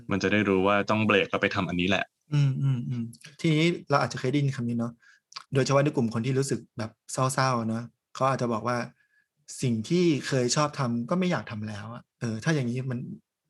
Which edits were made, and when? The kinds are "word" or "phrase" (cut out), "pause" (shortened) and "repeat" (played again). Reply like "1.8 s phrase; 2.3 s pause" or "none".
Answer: 2.2 s pause; 5.4 s pause; 12.1 s pause